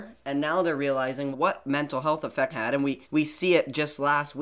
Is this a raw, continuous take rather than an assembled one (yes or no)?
no